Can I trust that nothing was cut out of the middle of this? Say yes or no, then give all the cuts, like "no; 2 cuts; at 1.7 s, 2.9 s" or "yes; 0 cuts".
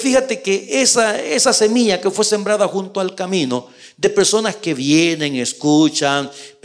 yes; 0 cuts